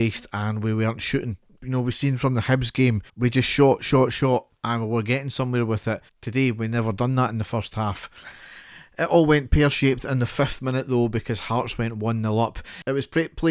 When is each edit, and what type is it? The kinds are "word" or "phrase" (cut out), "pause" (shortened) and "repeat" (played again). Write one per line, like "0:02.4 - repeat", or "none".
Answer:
0:03.1 - pause
0:06.1 - pause